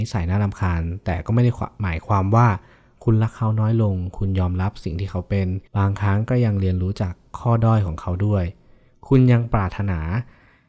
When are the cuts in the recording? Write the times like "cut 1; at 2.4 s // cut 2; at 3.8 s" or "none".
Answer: cut 1; at 5.7 s